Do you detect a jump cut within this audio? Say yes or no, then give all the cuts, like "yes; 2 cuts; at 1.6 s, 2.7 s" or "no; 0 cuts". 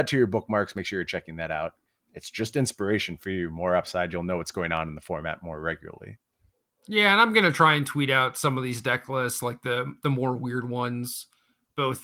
no; 0 cuts